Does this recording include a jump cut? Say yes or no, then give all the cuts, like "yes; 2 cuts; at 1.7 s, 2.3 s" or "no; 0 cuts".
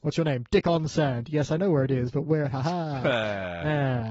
no; 0 cuts